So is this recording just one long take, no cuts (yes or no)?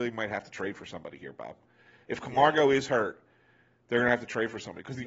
yes